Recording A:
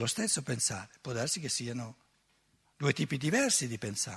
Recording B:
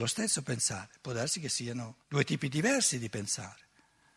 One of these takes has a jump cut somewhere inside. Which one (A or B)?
B